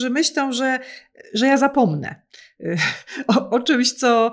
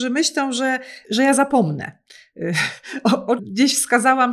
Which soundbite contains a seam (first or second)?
second